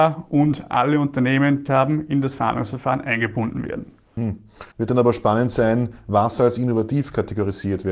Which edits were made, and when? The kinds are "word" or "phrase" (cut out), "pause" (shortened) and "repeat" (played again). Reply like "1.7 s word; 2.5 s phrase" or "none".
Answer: 1.7 s phrase; 4.7 s pause